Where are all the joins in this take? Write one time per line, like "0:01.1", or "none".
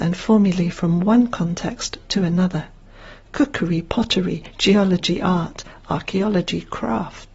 none